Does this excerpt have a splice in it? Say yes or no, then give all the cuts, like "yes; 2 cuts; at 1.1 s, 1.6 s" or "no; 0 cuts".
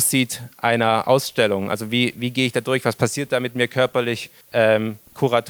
yes; 1 cut; at 4.4 s